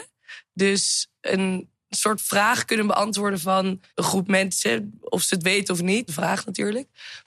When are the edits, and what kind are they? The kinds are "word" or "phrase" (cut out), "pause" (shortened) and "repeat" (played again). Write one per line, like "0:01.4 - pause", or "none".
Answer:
0:03.9 - pause
0:06.1 - phrase